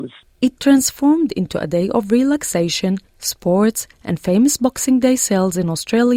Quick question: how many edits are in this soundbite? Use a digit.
0